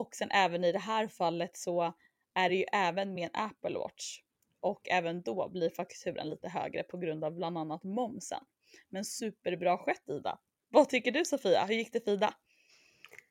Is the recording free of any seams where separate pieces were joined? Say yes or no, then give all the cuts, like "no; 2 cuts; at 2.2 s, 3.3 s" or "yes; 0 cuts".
yes; 0 cuts